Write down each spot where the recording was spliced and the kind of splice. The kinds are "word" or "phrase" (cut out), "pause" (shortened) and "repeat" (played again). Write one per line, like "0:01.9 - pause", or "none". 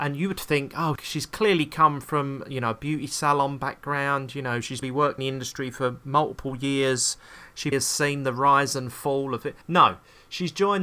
0:01.0 - word
0:04.8 - word
0:05.2 - word
0:07.7 - word
0:09.6 - pause